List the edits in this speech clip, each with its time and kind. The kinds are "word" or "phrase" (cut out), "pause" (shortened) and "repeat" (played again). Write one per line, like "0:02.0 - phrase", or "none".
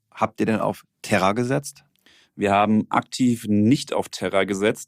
none